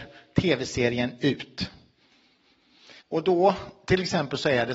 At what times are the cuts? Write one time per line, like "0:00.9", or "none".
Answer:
0:03.0